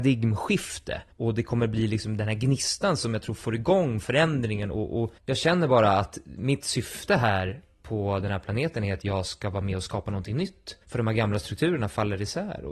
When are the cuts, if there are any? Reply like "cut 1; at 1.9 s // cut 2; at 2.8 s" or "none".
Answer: cut 1; at 1.1 s // cut 2; at 5.2 s // cut 3; at 10.8 s